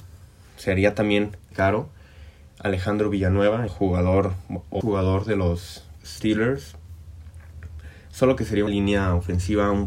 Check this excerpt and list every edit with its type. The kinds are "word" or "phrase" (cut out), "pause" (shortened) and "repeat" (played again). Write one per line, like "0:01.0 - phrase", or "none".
0:01.5 - word
0:03.7 - word
0:04.8 - word
0:06.0 - word
0:08.7 - word